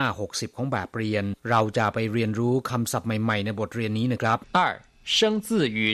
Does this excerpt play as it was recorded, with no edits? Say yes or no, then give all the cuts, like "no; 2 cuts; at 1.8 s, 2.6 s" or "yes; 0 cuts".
no; 2 cuts; at 1.4 s, 4.5 s